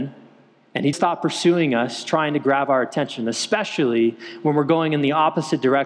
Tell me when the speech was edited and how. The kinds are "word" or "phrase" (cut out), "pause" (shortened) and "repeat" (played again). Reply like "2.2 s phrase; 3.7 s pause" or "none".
0.9 s word